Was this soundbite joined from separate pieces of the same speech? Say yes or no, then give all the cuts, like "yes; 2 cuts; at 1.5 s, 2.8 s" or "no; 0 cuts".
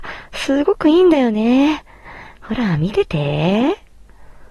no; 0 cuts